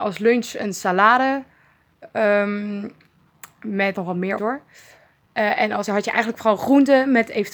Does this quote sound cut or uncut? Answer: cut